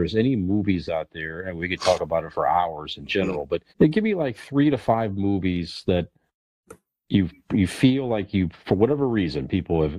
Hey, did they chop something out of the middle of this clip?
yes; 1 cut; at 3.7 s

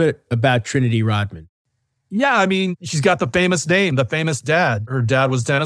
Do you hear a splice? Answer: no; 0 cuts

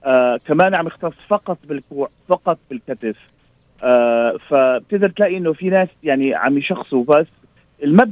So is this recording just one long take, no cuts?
yes; 0 cuts

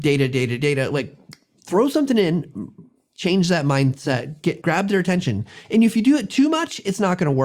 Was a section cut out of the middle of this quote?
yes; 1 cut; at 4.6 s

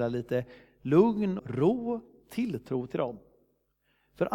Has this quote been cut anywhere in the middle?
yes; 1 cut; at 1.4 s

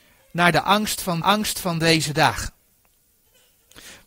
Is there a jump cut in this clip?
yes; 1 cut; at 1.2 s

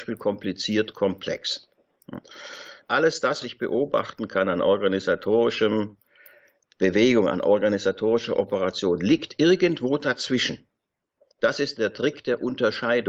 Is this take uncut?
no; 1 cut; at 3.4 s

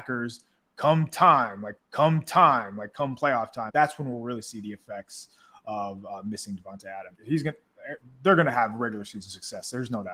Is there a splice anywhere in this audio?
yes; 3 cuts; at 1.8 s, 3.7 s, 7.1 s

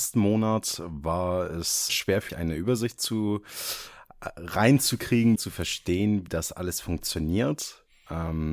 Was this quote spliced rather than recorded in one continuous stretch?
yes; 4 cuts; at 1.9 s, 2.3 s, 5.4 s, 6.3 s

